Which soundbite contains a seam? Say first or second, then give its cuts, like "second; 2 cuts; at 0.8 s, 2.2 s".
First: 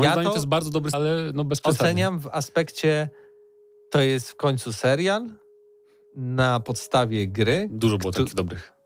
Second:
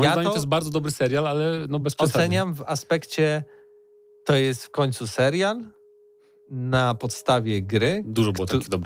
first; 1 cut; at 0.9 s